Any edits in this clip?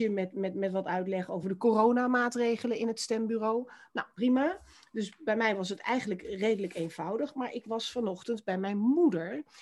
no; 0 cuts

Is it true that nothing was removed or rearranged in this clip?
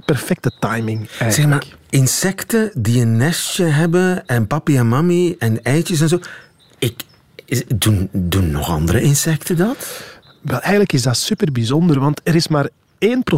yes; 0 cuts

